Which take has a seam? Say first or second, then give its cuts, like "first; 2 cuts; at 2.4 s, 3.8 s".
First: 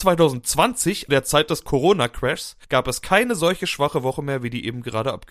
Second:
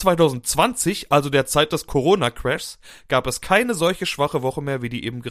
first; 2 cuts; at 1.1 s, 2.6 s